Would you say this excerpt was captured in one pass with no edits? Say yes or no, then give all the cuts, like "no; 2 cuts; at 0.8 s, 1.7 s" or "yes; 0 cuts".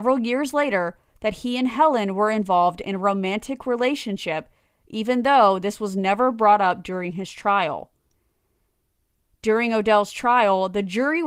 yes; 0 cuts